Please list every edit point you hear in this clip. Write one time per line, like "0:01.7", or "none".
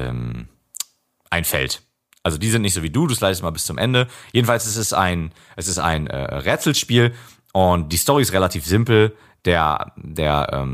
none